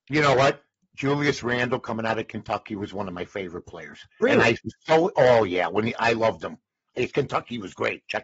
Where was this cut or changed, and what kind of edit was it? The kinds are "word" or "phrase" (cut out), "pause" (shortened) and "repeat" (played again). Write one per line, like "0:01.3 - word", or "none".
0:04.1 - pause